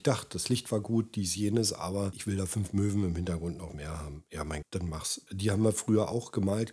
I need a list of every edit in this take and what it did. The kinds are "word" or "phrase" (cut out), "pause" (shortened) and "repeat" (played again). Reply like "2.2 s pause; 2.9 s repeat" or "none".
4.6 s word